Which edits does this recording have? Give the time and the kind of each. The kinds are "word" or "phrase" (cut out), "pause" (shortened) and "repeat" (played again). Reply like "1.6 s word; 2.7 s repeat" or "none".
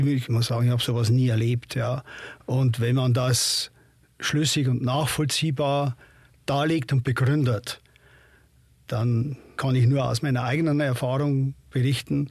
none